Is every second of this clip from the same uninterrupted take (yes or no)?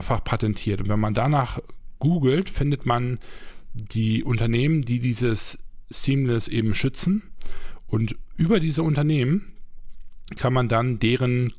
yes